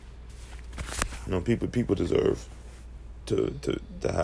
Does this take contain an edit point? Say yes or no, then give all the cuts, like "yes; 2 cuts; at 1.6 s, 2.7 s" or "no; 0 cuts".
no; 0 cuts